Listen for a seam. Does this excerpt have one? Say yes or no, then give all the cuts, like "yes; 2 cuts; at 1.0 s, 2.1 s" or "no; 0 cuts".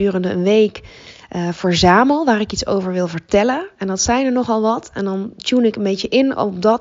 no; 0 cuts